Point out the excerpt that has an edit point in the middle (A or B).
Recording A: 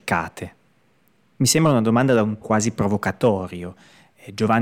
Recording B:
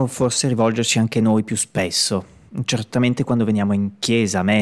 A